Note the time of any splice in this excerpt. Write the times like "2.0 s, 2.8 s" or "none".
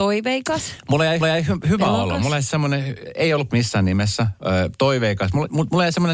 1.2 s, 3.5 s